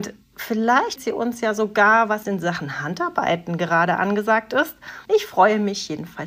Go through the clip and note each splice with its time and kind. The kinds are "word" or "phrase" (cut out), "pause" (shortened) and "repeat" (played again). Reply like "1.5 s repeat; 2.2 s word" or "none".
1.0 s word; 2.2 s phrase; 5.1 s pause

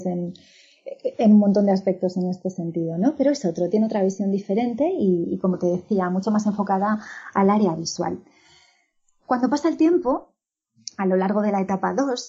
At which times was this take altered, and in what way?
none

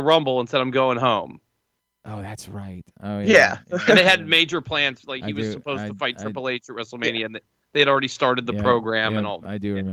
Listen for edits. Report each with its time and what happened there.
none

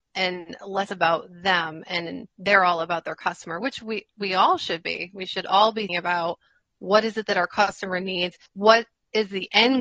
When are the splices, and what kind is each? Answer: 2.3 s pause; 5.9 s word; 8.5 s pause

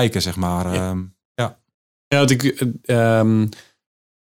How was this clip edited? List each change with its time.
none

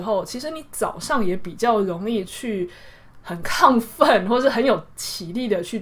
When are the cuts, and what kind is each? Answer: 3.2 s word

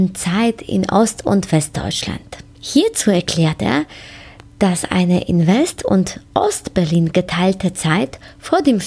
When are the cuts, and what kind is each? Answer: none

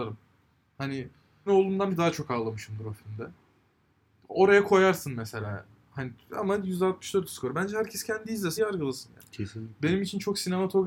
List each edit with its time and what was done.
1.5 s word; 1.9 s word; 8.6 s word

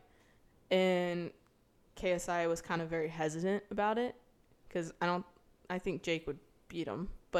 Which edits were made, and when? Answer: none

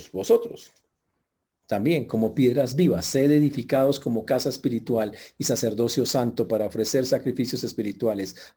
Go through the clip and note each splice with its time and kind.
none

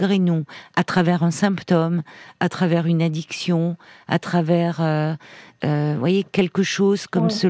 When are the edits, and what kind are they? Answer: none

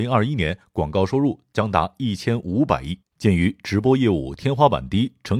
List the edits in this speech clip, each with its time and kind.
3.1 s pause

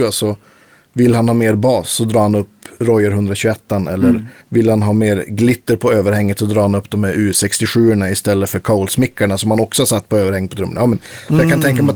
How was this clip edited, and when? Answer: 4.4 s pause

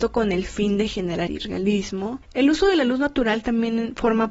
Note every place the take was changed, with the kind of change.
1.3 s word; 2.2 s word

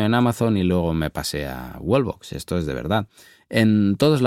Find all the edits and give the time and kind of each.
none

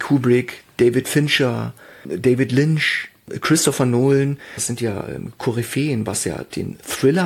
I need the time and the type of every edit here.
none

